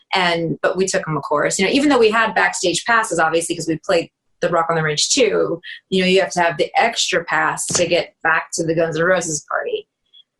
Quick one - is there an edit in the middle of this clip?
no; 0 cuts

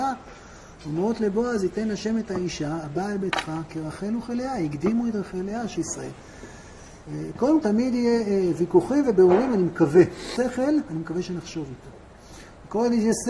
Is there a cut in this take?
yes; 3 cuts; at 5.7 s, 7.6 s, 10.4 s

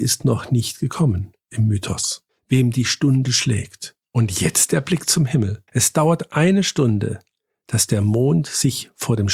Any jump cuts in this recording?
yes; 3 cuts; at 2.3 s, 4.0 s, 5.7 s

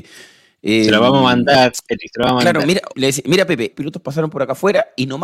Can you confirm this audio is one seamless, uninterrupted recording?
no; 2 cuts; at 2.9 s, 3.7 s

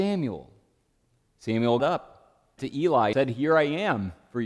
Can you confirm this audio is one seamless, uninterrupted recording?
no; 3 cuts; at 1.8 s, 2.6 s, 3.1 s

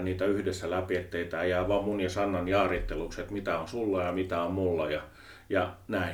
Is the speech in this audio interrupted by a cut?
no; 0 cuts

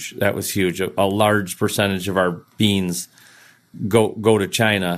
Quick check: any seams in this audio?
no; 0 cuts

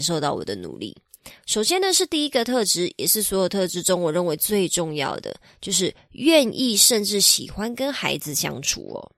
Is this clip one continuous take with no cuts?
yes; 0 cuts

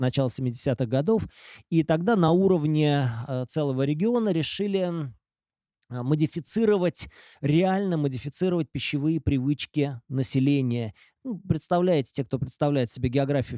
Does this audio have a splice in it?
no; 0 cuts

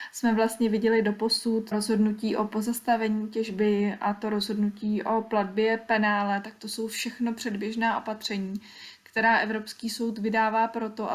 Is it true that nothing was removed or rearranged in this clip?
no; 1 cut; at 1.7 s

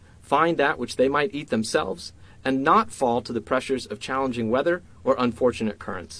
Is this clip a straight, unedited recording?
yes; 0 cuts

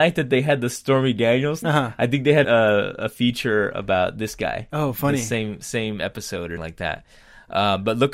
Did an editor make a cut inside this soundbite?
yes; 3 cuts; at 1.6 s, 2.4 s, 6.6 s

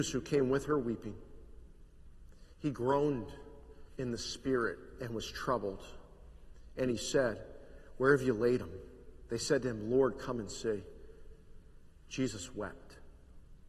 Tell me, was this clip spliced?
yes; 1 cut; at 3.9 s

